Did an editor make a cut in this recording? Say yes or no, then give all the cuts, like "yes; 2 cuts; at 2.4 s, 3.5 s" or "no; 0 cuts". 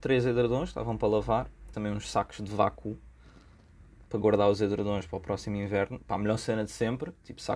yes; 2 cuts; at 1.7 s, 4.1 s